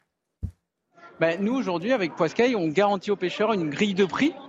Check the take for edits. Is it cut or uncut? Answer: uncut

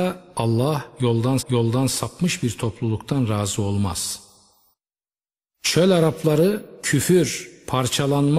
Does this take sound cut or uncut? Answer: cut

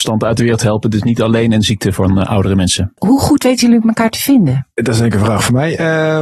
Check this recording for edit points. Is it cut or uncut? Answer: uncut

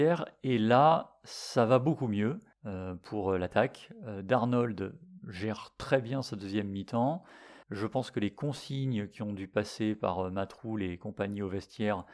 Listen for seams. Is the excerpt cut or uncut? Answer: cut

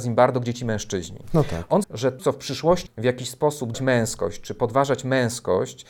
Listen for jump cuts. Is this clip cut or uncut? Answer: cut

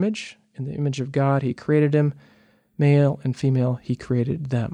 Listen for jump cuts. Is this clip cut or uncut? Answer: uncut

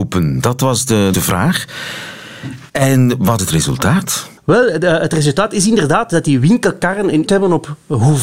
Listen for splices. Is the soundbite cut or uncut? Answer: cut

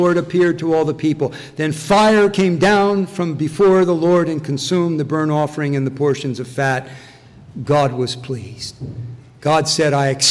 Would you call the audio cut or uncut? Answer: uncut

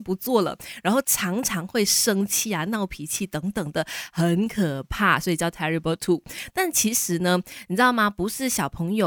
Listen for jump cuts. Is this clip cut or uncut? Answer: uncut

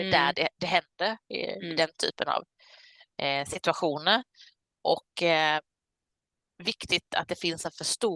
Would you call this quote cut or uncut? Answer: uncut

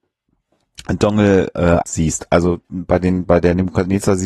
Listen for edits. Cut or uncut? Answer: cut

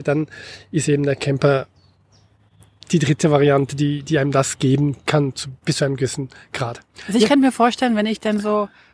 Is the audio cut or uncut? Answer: uncut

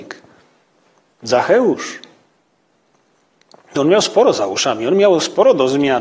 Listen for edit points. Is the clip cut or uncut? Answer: uncut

